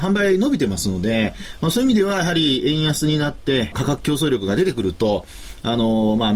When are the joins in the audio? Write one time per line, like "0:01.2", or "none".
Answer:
0:03.7